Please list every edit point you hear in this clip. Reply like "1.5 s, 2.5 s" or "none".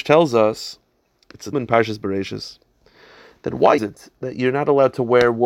1.5 s, 3.8 s